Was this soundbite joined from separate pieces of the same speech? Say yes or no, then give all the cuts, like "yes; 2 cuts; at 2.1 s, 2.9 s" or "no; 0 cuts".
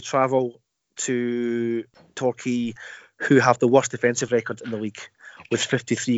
no; 0 cuts